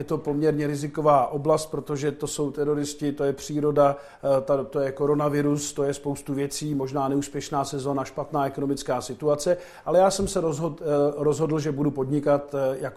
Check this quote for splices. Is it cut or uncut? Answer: uncut